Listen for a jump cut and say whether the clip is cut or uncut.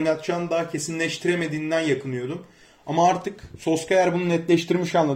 uncut